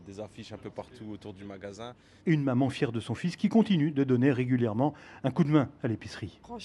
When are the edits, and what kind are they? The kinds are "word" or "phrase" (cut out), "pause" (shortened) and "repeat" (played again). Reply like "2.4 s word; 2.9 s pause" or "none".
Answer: none